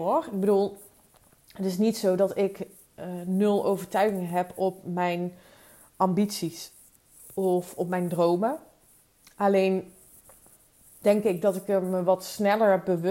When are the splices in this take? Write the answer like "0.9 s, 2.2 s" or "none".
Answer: none